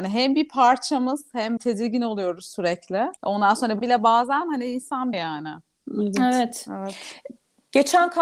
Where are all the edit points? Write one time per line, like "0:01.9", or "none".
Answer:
0:01.6
0:03.2
0:03.8
0:05.1